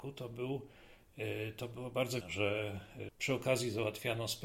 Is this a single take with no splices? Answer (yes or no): no